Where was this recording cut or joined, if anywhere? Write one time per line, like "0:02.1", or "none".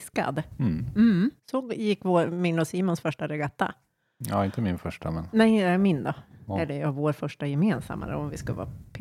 0:01.4